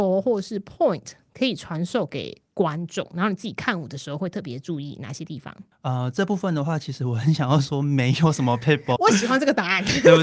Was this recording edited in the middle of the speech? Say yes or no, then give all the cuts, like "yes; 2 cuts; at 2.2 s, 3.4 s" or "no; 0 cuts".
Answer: yes; 1 cut; at 9.0 s